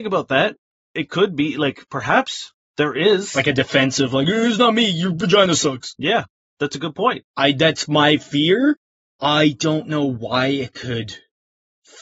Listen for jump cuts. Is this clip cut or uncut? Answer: cut